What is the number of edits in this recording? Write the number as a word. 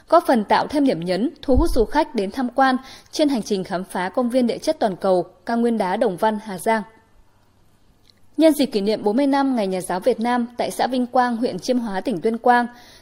zero